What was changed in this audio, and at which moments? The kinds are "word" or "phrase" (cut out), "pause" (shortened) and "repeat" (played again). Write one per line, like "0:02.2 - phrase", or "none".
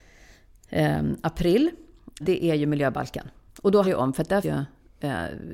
0:02.2 - word
0:03.8 - word
0:04.4 - word